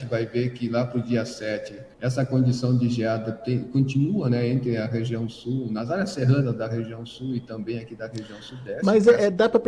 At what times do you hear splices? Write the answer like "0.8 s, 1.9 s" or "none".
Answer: 1.9 s